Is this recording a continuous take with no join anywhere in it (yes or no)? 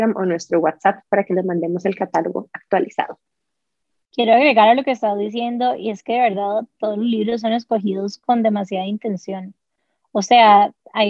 yes